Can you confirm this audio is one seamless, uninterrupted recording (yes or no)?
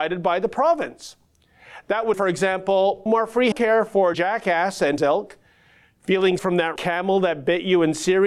no